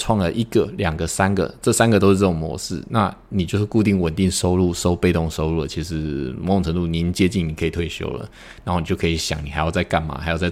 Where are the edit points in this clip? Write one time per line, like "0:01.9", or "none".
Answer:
none